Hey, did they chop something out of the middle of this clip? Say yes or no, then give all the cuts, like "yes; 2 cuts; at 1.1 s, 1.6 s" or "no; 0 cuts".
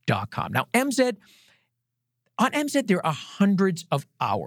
no; 0 cuts